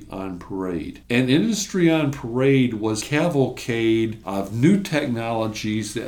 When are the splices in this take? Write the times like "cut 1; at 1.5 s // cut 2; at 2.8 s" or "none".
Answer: cut 1; at 1.0 s // cut 2; at 3.0 s